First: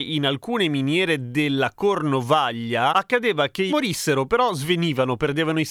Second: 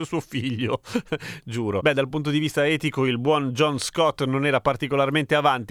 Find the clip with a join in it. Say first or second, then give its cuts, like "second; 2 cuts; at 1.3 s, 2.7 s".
first; 1 cut; at 3.7 s